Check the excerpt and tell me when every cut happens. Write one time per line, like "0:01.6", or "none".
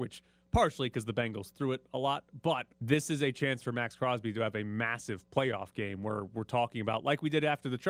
0:02.7